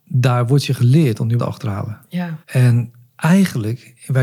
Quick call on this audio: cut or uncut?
cut